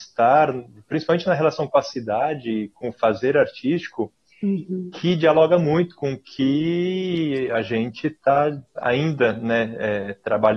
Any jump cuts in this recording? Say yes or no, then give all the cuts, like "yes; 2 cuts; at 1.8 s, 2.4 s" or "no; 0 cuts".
no; 0 cuts